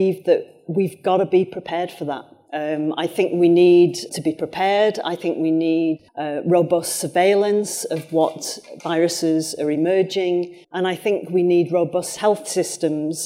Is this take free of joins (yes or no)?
no